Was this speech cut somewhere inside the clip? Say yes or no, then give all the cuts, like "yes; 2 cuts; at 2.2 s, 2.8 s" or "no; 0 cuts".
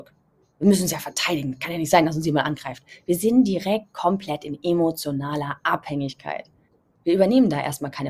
yes; 1 cut; at 6.7 s